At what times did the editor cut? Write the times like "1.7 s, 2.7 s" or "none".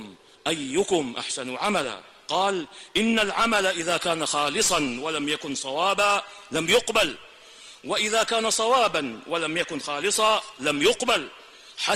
none